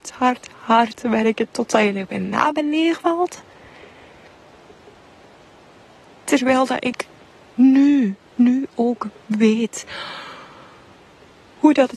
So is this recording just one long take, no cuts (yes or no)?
yes